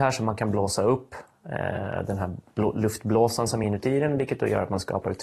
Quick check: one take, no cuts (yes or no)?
yes